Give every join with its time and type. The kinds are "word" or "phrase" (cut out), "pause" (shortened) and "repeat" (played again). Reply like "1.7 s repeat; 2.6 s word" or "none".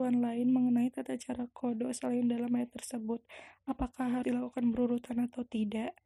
4.2 s word